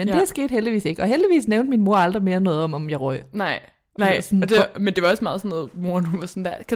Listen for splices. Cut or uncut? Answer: uncut